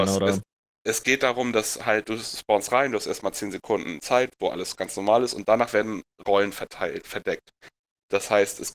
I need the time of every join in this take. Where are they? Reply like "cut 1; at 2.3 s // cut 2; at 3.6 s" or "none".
none